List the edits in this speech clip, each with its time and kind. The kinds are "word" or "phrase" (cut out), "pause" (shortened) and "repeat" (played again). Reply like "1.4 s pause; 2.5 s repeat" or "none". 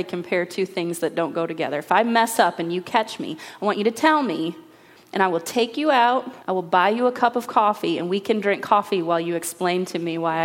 6.4 s pause

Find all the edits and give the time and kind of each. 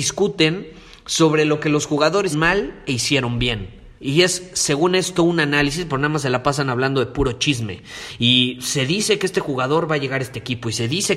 2.3 s word; 4.0 s pause

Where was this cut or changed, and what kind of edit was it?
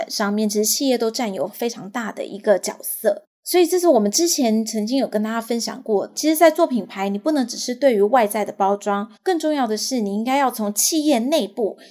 9.2 s pause

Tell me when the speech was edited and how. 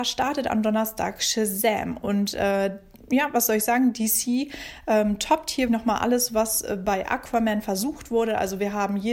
5.7 s word

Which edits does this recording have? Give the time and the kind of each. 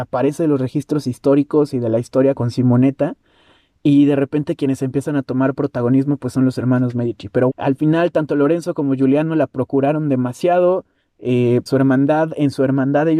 2.3 s word; 7.5 s word; 11.7 s word

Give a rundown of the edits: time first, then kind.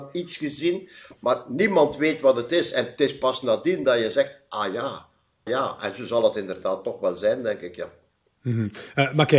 5.5 s word

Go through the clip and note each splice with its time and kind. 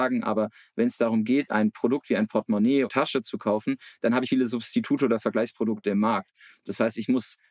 1.5 s word; 2.9 s phrase; 4.3 s phrase

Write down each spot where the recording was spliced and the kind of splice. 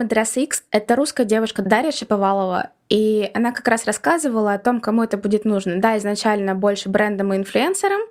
none

